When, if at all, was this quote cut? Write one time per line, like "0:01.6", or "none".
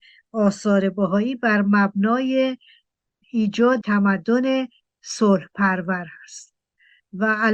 0:03.8